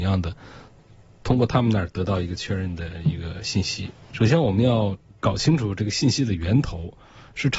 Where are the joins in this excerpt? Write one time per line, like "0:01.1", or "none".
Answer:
none

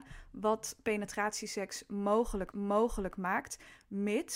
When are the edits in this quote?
0:02.5

